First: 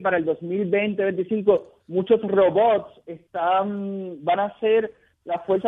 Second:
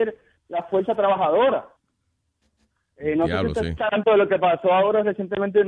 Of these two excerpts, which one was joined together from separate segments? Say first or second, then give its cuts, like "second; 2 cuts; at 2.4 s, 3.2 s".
second; 1 cut; at 3.9 s